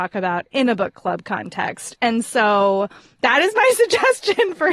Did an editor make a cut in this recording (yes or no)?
no